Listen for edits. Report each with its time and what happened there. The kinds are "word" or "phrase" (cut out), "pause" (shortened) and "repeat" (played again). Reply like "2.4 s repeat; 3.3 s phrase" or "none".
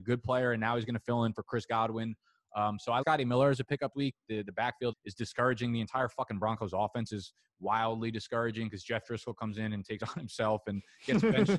3.0 s word; 3.9 s word; 4.9 s word; 10.0 s word